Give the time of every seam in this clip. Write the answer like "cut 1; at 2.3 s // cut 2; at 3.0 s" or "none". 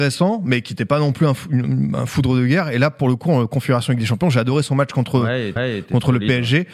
cut 1; at 5.6 s